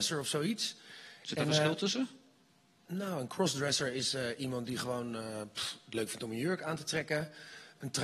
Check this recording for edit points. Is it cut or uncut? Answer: uncut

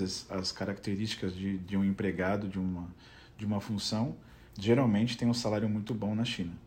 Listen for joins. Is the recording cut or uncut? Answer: cut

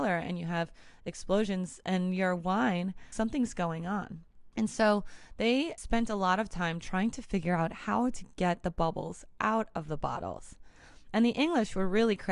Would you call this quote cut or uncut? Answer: cut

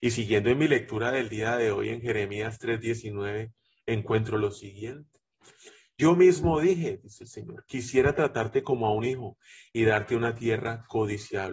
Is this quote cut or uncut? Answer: uncut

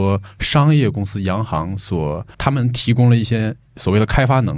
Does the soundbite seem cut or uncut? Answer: cut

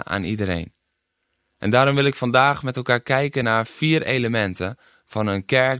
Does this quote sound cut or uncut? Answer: uncut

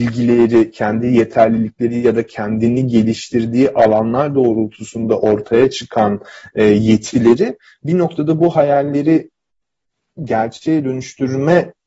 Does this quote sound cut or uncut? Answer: uncut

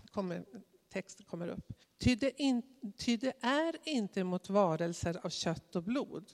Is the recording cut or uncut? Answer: cut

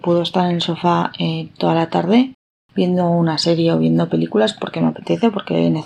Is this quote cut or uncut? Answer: uncut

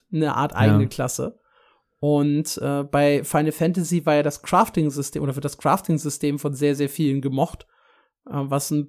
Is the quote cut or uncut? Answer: uncut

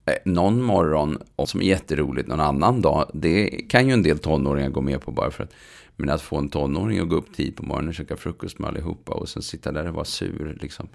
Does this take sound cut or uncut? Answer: cut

